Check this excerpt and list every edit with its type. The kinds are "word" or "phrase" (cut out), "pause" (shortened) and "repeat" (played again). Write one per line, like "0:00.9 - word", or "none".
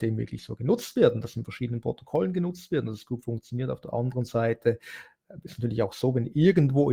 none